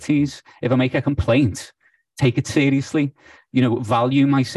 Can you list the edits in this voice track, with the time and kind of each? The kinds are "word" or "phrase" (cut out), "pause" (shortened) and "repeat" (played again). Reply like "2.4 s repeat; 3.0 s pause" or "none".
none